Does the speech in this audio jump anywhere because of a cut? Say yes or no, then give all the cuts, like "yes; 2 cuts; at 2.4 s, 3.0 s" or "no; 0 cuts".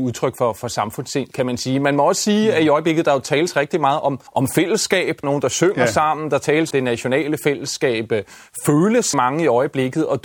yes; 4 cuts; at 4.3 s, 5.2 s, 6.7 s, 9.1 s